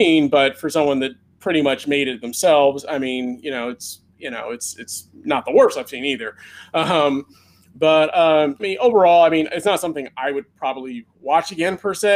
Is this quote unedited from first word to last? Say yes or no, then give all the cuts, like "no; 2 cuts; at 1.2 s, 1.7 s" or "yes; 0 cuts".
no; 1 cut; at 8.6 s